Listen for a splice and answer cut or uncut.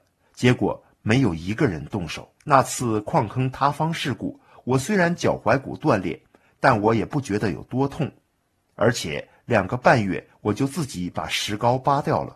cut